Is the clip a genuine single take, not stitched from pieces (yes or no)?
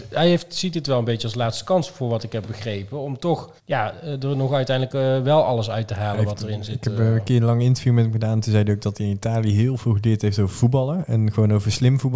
no